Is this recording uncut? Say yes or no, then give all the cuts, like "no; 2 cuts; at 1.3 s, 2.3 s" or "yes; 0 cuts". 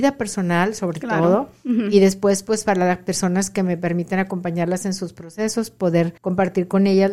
no; 1 cut; at 6.2 s